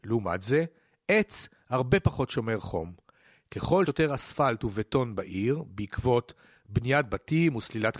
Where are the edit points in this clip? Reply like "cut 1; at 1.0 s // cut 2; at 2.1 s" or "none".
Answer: cut 1; at 3.9 s